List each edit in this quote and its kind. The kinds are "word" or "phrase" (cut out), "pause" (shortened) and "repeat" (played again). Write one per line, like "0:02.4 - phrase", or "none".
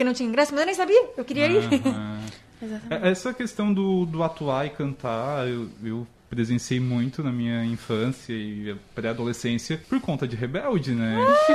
0:09.8 - pause